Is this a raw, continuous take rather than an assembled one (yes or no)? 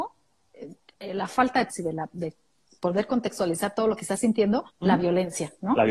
no